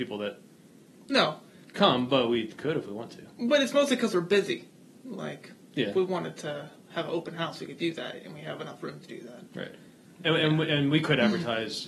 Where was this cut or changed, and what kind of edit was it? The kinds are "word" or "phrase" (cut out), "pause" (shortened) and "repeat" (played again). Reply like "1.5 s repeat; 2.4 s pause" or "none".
none